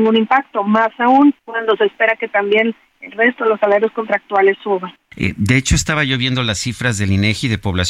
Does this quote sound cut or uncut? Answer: cut